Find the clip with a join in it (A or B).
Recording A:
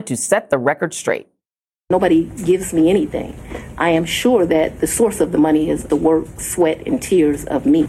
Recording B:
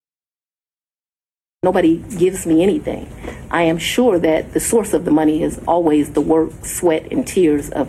A